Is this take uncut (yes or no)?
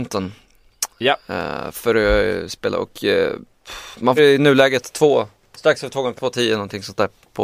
no